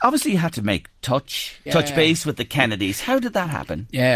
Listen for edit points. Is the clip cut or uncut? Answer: cut